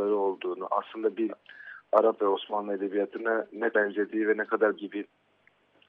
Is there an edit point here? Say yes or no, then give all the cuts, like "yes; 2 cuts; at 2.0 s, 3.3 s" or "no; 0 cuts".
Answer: yes; 4 cuts; at 1.3 s, 2.2 s, 3.7 s, 4.8 s